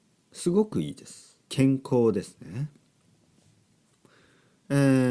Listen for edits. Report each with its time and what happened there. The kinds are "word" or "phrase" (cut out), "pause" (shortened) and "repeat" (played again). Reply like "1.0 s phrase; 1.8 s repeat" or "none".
1.4 s pause